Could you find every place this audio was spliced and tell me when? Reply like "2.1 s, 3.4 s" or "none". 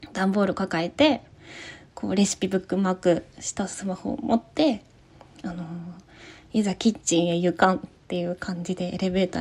none